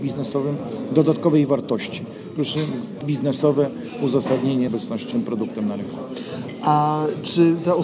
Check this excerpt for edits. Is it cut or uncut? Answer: cut